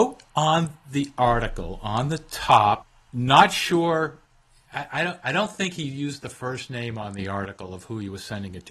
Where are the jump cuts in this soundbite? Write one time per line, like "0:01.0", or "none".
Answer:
none